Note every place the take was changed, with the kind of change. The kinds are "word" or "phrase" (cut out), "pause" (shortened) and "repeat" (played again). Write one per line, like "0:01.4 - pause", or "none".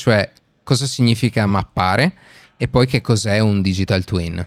none